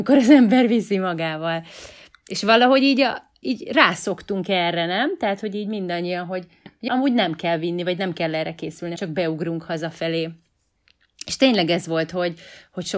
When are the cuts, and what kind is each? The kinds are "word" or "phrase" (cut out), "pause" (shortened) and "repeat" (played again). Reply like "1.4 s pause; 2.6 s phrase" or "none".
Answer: 3.4 s word; 6.9 s word; 9.0 s word